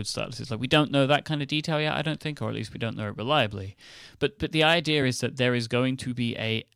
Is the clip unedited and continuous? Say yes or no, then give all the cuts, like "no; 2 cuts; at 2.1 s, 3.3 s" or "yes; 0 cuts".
yes; 0 cuts